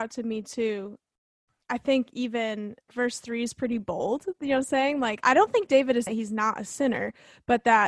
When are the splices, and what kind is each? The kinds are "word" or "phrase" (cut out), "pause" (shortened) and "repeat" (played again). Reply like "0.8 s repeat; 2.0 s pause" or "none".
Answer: 1.3 s pause; 2.9 s word; 5.2 s word; 6.1 s word